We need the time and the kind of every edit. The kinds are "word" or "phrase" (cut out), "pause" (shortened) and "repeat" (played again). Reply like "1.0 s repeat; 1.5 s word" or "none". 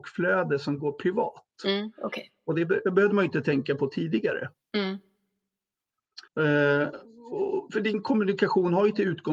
6.3 s pause